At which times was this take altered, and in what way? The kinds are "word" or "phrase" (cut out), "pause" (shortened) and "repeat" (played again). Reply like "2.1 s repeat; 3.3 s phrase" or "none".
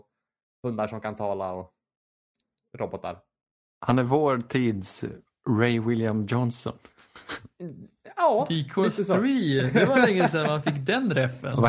none

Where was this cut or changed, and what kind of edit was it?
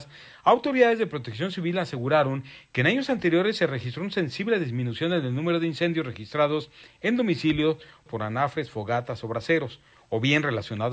8.1 s word

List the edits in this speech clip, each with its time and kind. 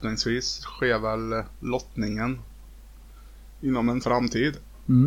4.0 s word

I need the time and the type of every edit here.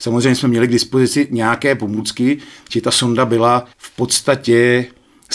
3.7 s pause

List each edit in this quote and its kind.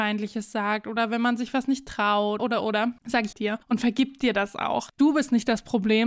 2.4 s word; 3.3 s phrase; 3.6 s pause

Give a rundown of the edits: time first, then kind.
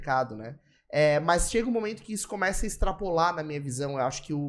none

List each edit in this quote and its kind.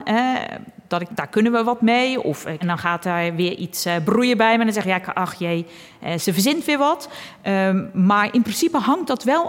1.1 s phrase; 2.6 s phrase

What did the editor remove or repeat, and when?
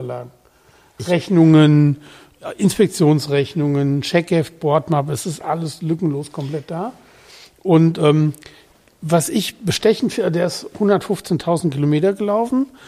none

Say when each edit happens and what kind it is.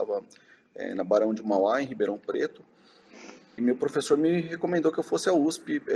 3.6 s word

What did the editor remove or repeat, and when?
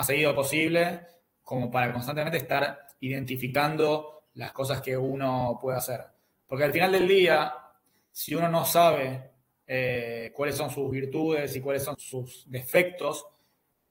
11.9 s word

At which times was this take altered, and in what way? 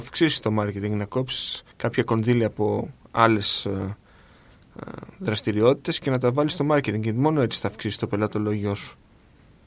1.7 s pause

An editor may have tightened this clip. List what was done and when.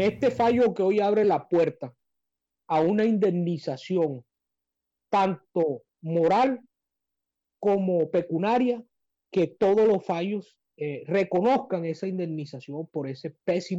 none

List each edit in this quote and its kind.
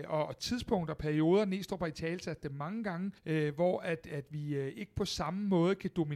3.2 s pause

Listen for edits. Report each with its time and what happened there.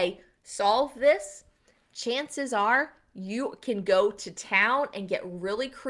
none

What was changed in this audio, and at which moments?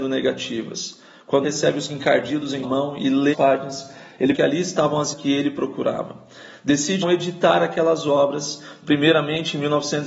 1.4 s word; 1.9 s word; 2.6 s word; 3.3 s word; 4.3 s word; 5.1 s word; 7.0 s word

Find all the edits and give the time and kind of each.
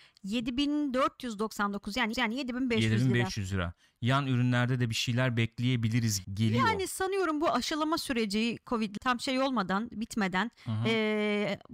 2.1 s repeat; 6.2 s word; 9.0 s word

